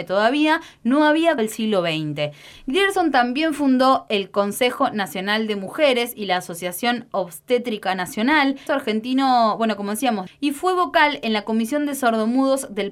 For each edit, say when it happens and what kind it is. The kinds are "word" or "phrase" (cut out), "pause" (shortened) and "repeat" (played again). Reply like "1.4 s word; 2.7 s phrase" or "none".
1.4 s word; 8.7 s phrase; 10.3 s phrase